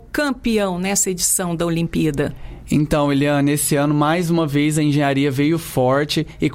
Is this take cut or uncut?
uncut